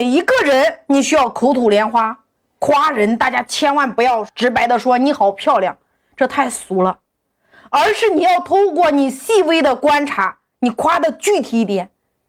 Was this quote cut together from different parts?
yes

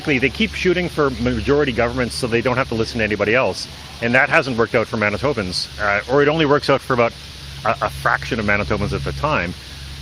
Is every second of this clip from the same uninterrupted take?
yes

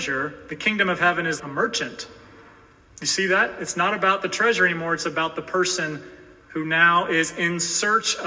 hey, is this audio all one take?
no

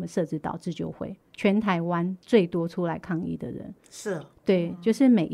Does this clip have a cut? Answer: yes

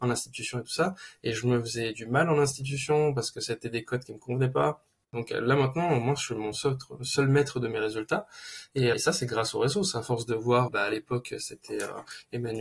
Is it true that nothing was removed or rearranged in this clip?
no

